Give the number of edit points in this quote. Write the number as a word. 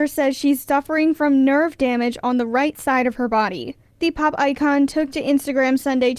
zero